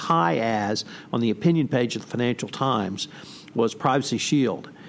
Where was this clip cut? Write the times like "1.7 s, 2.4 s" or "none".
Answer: none

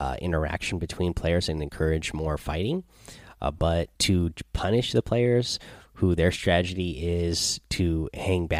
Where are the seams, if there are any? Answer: 3.9 s

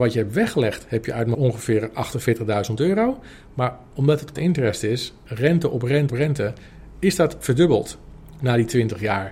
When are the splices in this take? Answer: 1.3 s, 4.4 s, 6.1 s

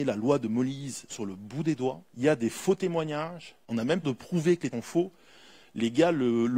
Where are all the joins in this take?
1.1 s, 2.1 s, 3.6 s, 4.0 s, 4.7 s

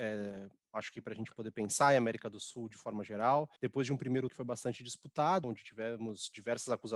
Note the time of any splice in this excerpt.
3.6 s, 4.3 s, 5.4 s

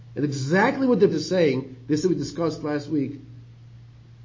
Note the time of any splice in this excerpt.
1.1 s, 2.0 s

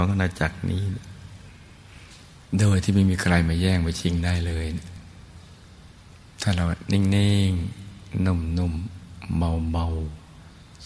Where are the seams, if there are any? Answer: none

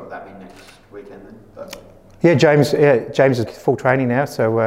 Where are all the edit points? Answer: 3.4 s

